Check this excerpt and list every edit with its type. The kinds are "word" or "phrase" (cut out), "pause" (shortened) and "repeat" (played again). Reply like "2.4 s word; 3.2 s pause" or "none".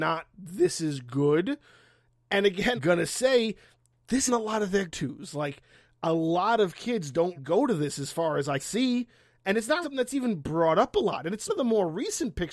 2.8 s word; 4.3 s word; 4.9 s word; 7.4 s word; 8.6 s word; 9.8 s word; 11.5 s word